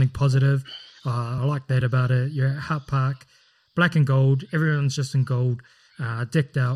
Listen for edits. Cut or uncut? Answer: uncut